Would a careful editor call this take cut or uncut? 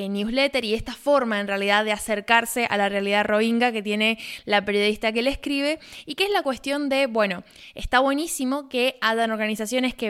uncut